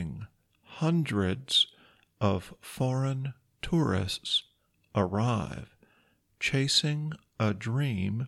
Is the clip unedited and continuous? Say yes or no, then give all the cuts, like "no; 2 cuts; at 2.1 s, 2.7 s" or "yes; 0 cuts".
yes; 0 cuts